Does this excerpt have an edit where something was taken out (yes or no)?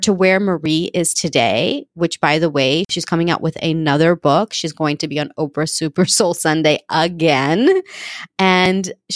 no